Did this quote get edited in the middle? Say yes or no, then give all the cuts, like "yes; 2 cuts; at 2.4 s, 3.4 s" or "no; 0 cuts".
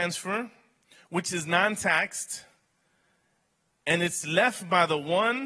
no; 0 cuts